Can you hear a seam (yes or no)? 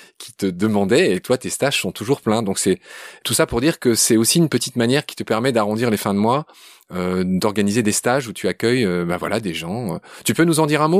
no